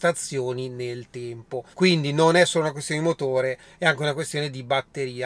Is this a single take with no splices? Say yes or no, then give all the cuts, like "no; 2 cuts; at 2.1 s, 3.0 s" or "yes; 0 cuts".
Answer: no; 1 cut; at 1.7 s